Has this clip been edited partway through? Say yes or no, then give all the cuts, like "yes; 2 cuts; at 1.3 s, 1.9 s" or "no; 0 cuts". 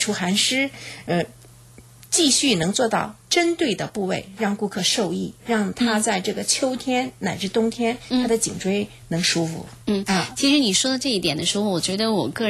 yes; 2 cuts; at 3.2 s, 9.8 s